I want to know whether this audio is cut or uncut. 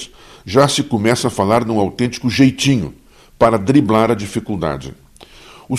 uncut